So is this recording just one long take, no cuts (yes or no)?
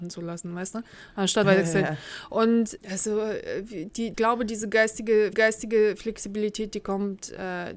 no